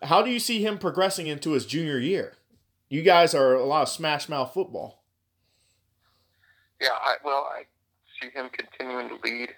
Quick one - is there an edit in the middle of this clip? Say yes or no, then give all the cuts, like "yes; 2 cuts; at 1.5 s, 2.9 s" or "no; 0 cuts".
no; 0 cuts